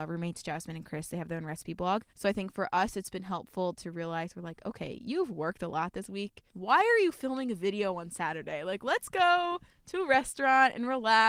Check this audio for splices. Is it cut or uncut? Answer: cut